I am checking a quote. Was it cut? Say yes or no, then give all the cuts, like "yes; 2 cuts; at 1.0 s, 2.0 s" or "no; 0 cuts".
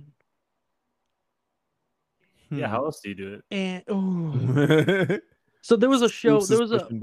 yes; 1 cut; at 3.5 s